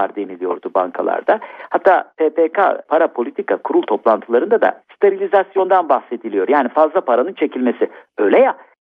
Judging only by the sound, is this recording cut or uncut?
uncut